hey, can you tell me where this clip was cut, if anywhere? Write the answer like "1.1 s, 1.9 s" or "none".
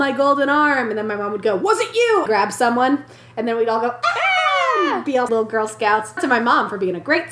2.3 s, 5.3 s, 6.2 s